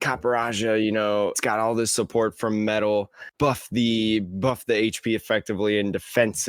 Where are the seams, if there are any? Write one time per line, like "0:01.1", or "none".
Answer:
0:01.3
0:03.3